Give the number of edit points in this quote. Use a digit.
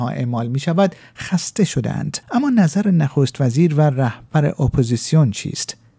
1